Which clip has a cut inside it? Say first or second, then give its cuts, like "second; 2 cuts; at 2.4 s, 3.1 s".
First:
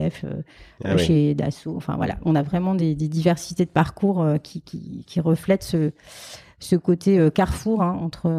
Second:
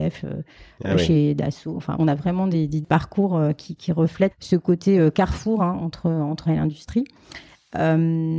second; 5 cuts; at 2.0 s, 2.8 s, 3.8 s, 4.3 s, 6.5 s